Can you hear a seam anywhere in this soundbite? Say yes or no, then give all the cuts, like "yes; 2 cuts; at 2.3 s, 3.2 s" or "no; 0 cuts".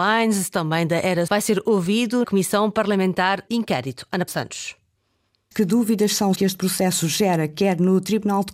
yes; 6 cuts; at 1.3 s, 2.2 s, 3.5 s, 4.3 s, 5.5 s, 6.3 s